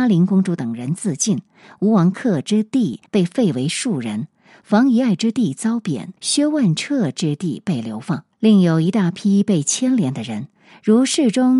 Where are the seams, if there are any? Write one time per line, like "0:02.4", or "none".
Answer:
0:03.1
0:06.2
0:08.3